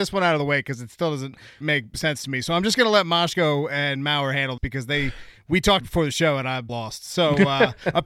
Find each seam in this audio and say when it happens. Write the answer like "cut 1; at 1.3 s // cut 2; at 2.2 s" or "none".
cut 1; at 1.6 s // cut 2; at 4.6 s // cut 3; at 5.8 s // cut 4; at 6.7 s